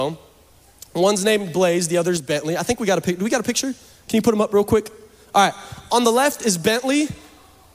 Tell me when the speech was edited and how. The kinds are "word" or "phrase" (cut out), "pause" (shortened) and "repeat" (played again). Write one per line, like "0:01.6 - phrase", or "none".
none